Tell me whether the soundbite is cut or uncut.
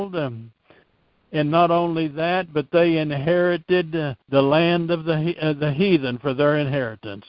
cut